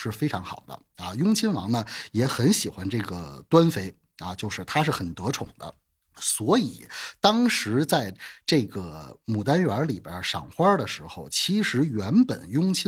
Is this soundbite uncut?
yes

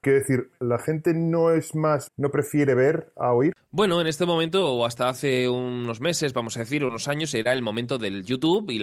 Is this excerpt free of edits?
no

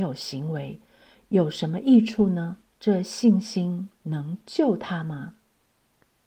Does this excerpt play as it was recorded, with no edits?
no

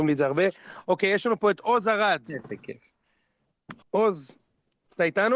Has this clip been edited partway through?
yes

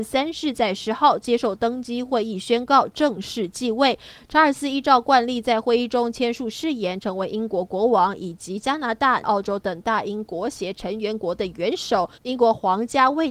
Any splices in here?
yes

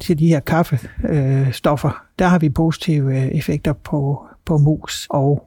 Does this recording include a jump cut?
no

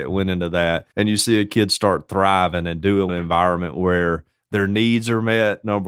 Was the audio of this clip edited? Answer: yes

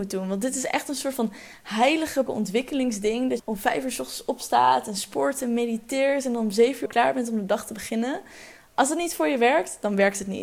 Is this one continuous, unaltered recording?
no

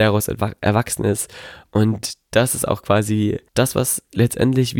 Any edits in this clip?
yes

